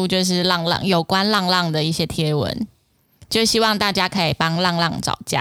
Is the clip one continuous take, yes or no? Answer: yes